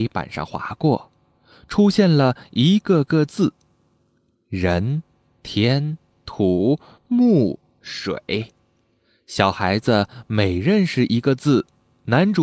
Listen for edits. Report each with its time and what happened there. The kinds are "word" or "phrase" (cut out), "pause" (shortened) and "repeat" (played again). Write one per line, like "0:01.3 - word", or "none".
none